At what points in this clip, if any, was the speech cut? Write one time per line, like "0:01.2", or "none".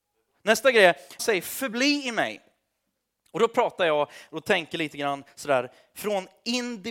0:01.2